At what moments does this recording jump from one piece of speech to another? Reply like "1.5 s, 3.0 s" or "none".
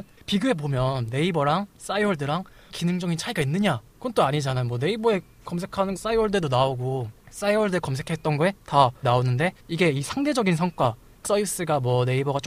2.7 s, 3.9 s, 6.0 s, 9.0 s, 9.6 s, 11.2 s